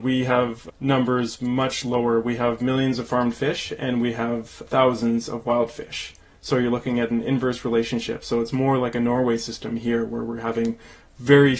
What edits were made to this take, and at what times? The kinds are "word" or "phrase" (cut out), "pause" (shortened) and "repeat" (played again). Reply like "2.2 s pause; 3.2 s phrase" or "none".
none